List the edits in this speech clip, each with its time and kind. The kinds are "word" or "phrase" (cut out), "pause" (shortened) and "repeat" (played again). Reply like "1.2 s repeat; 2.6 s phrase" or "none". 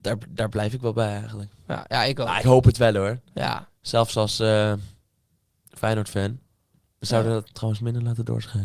2.4 s phrase; 7.5 s word